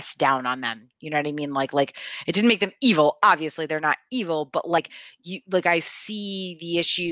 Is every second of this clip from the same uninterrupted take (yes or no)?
yes